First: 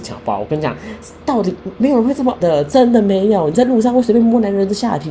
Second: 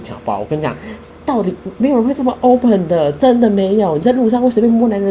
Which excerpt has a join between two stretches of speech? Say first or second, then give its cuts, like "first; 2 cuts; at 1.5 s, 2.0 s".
first; 1 cut; at 2.4 s